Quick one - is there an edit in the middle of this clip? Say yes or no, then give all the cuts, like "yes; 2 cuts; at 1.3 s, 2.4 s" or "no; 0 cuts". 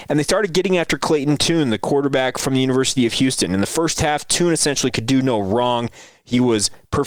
no; 0 cuts